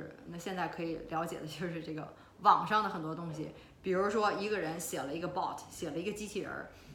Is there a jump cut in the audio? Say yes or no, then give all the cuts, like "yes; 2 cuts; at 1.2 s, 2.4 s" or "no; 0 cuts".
no; 0 cuts